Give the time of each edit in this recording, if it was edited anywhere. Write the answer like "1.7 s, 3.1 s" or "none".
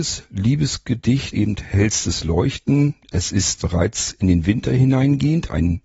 1.3 s, 3.6 s